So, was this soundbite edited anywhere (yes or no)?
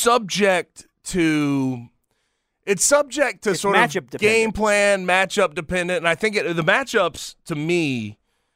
no